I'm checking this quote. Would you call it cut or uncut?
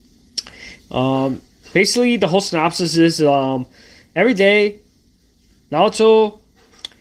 uncut